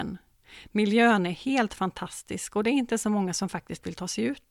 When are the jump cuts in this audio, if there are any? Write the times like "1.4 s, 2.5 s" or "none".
none

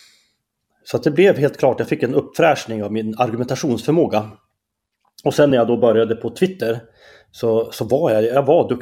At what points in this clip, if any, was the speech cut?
none

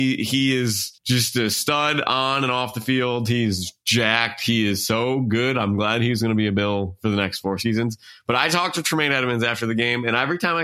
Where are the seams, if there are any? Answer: 1.0 s

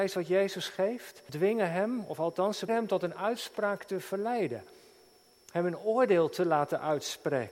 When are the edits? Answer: 1.3 s, 2.7 s

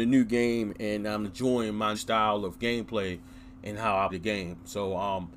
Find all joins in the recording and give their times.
1.2 s, 1.9 s, 4.1 s

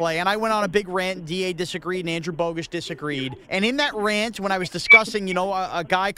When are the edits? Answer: 3.4 s

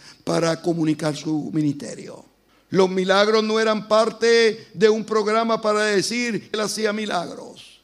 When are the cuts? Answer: 2.5 s, 6.5 s

